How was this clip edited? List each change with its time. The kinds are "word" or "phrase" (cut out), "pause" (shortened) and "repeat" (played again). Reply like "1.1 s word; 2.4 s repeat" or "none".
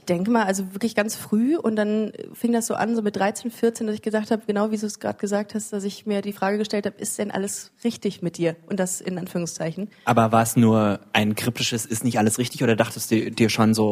none